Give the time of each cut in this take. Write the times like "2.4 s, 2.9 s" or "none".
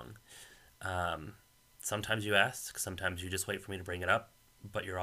none